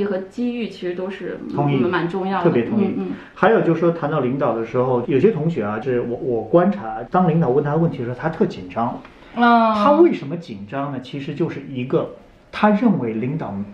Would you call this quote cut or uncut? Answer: uncut